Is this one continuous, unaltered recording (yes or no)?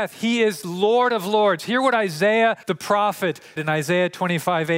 no